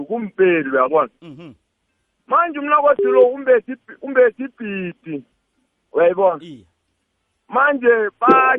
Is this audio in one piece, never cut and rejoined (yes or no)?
yes